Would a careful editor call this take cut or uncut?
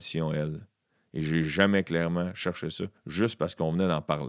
cut